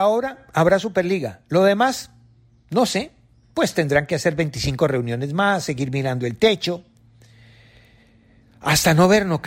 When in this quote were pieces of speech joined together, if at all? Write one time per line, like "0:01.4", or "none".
none